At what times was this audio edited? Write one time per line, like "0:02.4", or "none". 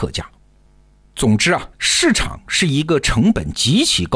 0:01.7